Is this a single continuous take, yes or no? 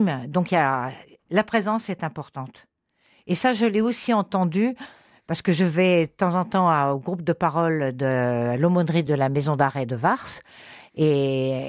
yes